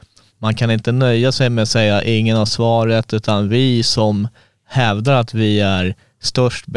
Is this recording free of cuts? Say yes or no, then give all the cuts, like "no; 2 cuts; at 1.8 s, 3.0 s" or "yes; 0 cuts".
yes; 0 cuts